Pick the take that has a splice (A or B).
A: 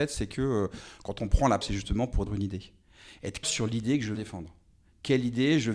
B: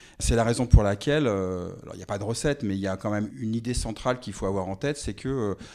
A